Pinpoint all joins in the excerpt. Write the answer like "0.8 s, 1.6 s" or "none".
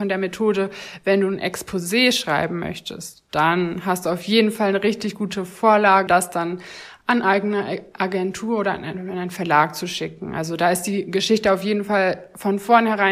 6.1 s